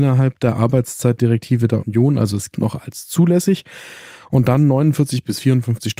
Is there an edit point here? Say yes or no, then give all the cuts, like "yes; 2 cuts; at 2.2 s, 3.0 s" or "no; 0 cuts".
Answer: yes; 2 cuts; at 1.8 s, 2.5 s